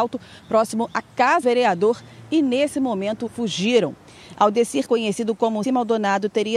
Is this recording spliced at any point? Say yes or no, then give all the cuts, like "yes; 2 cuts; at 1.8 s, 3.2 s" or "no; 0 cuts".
yes; 4 cuts; at 1.4 s, 3.3 s, 4.9 s, 5.6 s